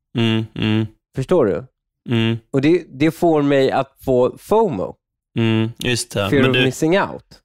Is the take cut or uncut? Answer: uncut